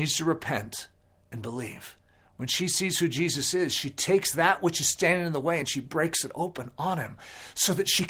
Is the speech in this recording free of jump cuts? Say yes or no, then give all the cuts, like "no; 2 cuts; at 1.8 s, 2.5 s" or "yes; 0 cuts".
yes; 0 cuts